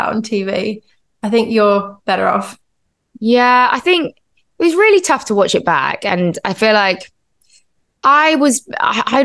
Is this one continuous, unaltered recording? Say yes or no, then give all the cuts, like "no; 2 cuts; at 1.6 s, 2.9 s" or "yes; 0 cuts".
yes; 0 cuts